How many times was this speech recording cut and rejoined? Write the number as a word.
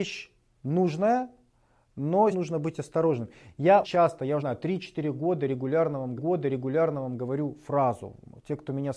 four